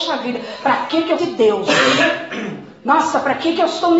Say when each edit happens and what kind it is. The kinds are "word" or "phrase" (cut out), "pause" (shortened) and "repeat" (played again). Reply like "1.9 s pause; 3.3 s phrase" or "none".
1.2 s word